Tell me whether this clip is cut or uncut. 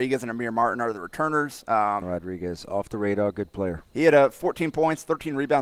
cut